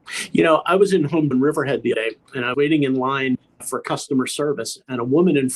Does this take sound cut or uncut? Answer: cut